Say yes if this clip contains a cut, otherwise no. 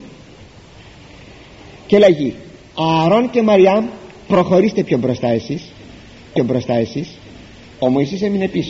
yes